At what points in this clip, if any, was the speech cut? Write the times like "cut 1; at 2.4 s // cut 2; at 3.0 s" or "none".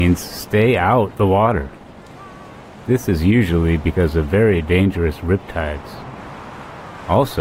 cut 1; at 1.1 s